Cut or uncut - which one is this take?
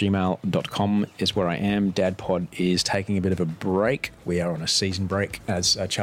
uncut